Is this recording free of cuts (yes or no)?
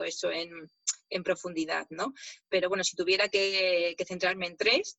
yes